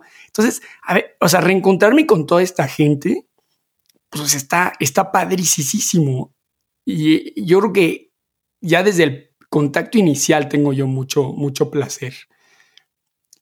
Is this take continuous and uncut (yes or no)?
yes